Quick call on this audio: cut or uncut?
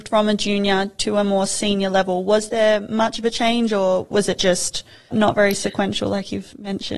uncut